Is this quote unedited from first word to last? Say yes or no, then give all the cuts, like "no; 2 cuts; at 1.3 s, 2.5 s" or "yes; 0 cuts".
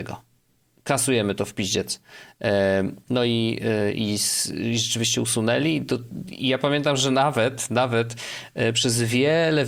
yes; 0 cuts